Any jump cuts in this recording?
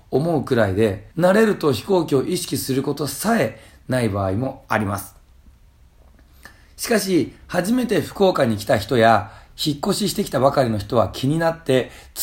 yes; 1 cut; at 1.1 s

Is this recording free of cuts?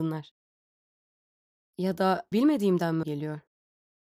no; 2 cuts; at 2.3 s, 3.0 s

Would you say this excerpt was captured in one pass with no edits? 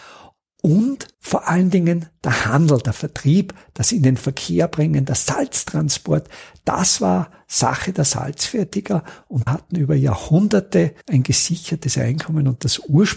no; 3 cuts; at 1.1 s, 9.5 s, 11.0 s

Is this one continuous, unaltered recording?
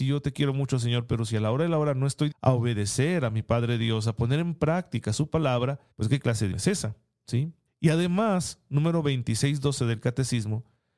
no; 4 cuts; at 2.3 s, 5.9 s, 6.5 s, 7.7 s

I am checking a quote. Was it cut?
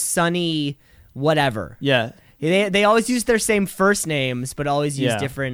no; 0 cuts

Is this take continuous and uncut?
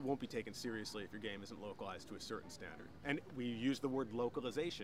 yes; 0 cuts

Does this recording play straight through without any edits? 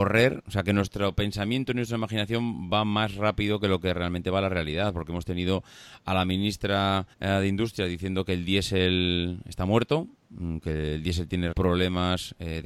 no; 2 cuts; at 7.1 s, 11.5 s

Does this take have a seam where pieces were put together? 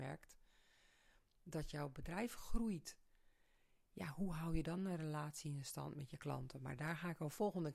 no; 0 cuts

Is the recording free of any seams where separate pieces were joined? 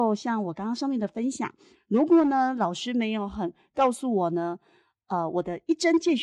yes; 0 cuts

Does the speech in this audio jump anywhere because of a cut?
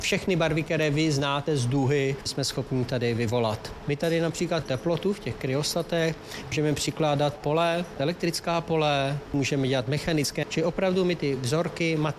yes; 3 cuts; at 4.6 s, 7.4 s, 10.4 s

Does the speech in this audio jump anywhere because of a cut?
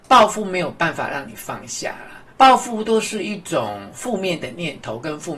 yes; 1 cut; at 2.3 s

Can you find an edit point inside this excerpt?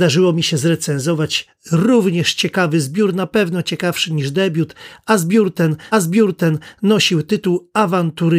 yes; 1 cut; at 5.9 s

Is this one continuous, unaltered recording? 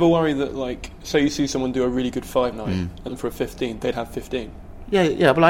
no; 3 cuts; at 2.5 s, 3.1 s, 3.9 s

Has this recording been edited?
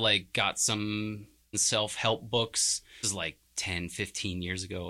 yes; 2 cuts; at 1.5 s, 3.0 s

